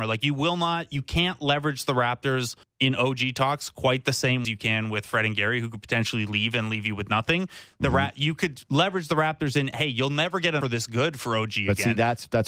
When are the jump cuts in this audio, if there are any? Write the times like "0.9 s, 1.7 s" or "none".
2.6 s, 4.4 s, 10.6 s